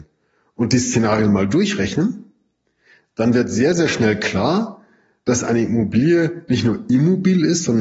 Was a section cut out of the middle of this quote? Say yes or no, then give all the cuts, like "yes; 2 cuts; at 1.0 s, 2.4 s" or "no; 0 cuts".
no; 0 cuts